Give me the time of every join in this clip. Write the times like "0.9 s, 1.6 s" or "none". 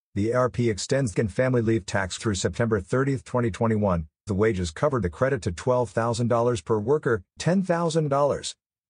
1.1 s, 2.2 s, 4.3 s, 5.0 s, 7.4 s